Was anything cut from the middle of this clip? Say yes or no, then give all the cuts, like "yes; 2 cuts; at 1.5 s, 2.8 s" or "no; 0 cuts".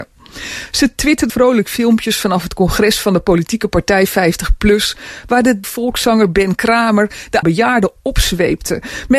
yes; 3 cuts; at 1.3 s, 5.6 s, 7.4 s